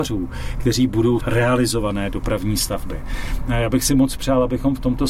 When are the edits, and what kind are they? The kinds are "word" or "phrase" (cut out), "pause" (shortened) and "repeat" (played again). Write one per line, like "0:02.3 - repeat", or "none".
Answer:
0:01.2 - phrase

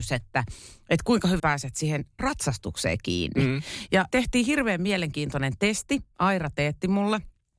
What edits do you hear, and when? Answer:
0:01.4 - word
0:02.2 - word
0:04.1 - word

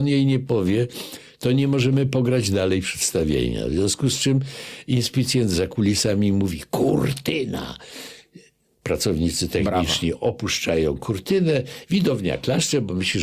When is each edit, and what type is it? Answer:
0:08.7 - pause

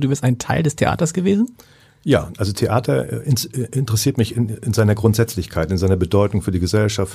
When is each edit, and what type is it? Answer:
none

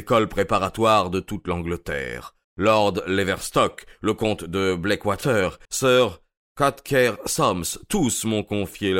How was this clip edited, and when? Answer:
0:02.4 - pause
0:05.6 - pause

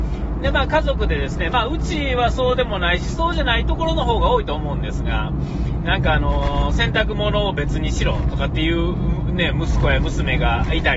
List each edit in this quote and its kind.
none

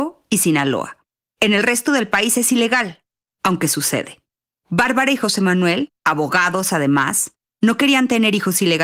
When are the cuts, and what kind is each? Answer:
none

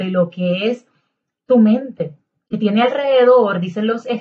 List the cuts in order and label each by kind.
none

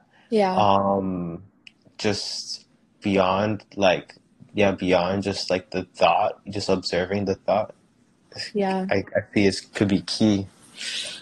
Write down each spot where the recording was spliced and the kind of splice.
none

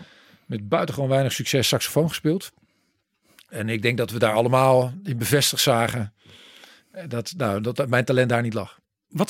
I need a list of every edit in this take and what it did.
none

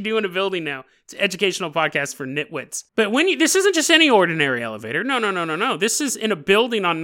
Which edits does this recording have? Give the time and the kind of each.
0:02.9 - pause

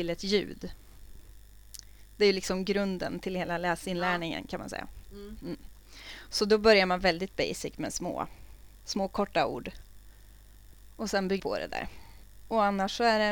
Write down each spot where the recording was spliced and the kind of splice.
0:08.7 - pause
0:11.4 - word

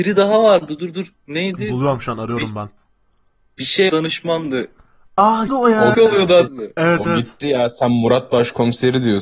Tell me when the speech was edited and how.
0:03.9 - word
0:05.5 - word
0:05.9 - word
0:06.5 - word

